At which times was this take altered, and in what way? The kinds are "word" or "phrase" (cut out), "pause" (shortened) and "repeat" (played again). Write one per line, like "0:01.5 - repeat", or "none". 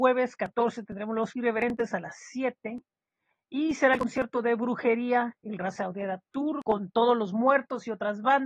none